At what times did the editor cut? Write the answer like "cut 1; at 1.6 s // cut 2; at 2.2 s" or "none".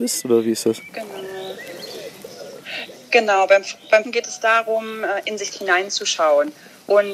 cut 1; at 4.0 s // cut 2; at 5.5 s